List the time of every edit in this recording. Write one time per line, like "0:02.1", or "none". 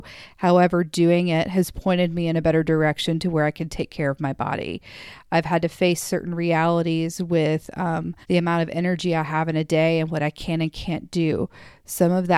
0:08.2